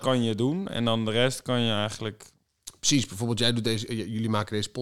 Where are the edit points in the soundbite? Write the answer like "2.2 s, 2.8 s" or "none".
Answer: none